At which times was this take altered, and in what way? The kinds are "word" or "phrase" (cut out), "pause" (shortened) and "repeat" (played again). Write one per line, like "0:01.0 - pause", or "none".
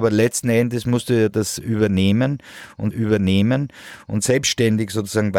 0:02.9 - repeat